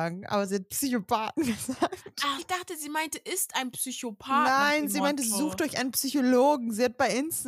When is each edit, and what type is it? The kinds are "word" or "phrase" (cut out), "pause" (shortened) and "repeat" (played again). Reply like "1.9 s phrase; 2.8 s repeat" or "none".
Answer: 2.4 s word